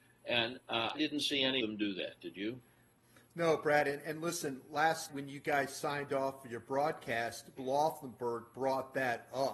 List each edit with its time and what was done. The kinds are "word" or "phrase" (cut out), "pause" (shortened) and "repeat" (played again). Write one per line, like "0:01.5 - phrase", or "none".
0:00.9 - word
0:01.6 - word
0:05.1 - word
0:07.6 - word